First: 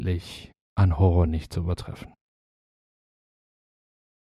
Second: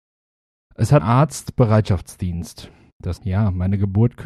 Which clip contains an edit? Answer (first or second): second